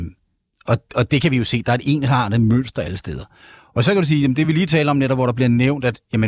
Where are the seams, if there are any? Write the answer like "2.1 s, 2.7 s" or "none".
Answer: none

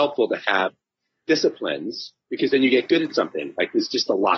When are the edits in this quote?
none

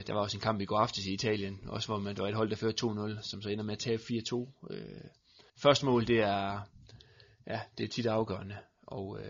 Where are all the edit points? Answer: 5.5 s

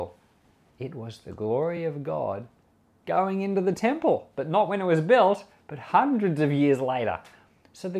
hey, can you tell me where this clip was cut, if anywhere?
none

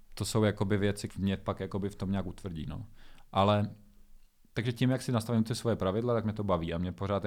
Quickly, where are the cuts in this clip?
1.1 s

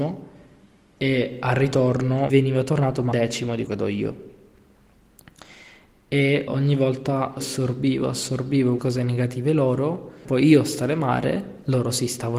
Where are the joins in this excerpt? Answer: 2.3 s, 3.1 s, 3.7 s, 6.5 s, 7.4 s, 8.8 s, 10.2 s

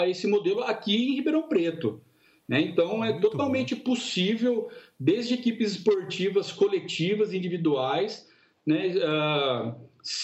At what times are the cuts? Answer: none

